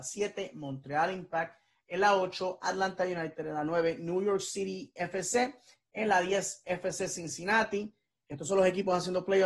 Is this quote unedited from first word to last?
yes; 0 cuts

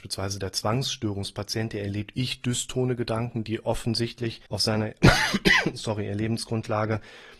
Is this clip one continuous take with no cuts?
no; 1 cut; at 4.5 s

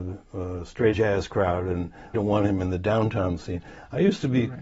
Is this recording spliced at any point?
yes; 2 cuts; at 0.9 s, 2.1 s

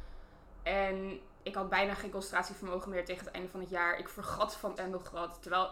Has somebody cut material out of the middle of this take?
yes; 1 cut; at 4.8 s

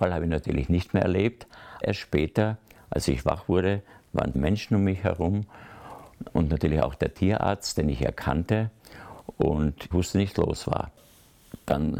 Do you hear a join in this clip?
yes; 4 cuts; at 1.8 s, 4.3 s, 9.9 s, 10.3 s

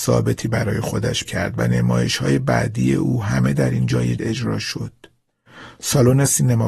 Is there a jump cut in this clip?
yes; 2 cuts; at 1.2 s, 4.2 s

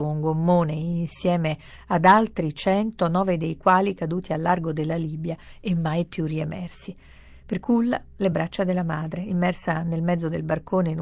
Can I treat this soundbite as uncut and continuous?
yes; 0 cuts

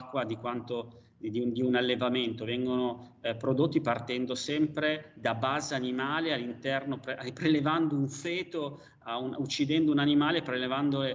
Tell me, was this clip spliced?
no; 0 cuts

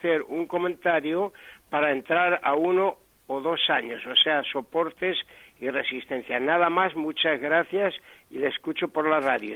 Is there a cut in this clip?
no; 0 cuts

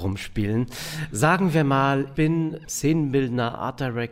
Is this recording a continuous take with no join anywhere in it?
no; 2 cuts; at 2.1 s, 2.6 s

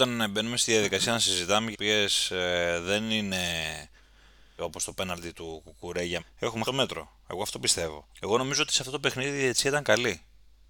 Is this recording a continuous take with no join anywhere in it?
no; 6 cuts; at 1.7 s, 4.6 s, 5.3 s, 6.2 s, 6.7 s, 8.1 s

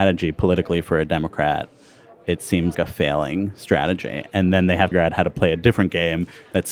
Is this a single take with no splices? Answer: no; 2 cuts; at 2.7 s, 4.9 s

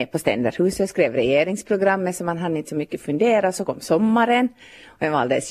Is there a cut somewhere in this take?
no; 0 cuts

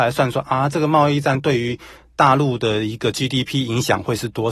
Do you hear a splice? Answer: no; 0 cuts

